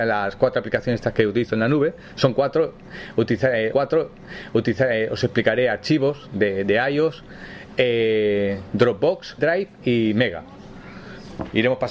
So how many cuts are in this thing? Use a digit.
2